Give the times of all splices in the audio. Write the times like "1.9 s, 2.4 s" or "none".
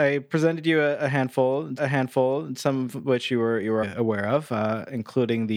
1.8 s, 3.8 s